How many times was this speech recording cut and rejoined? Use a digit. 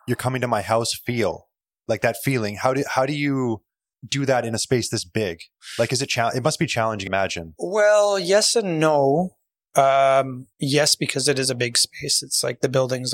4